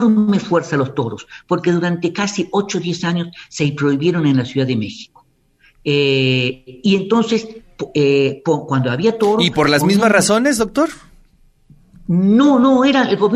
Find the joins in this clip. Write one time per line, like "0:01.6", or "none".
none